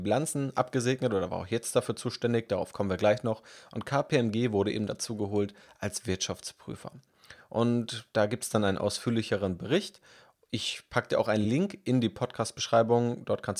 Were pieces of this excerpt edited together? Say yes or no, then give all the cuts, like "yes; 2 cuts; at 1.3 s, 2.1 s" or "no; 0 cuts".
no; 0 cuts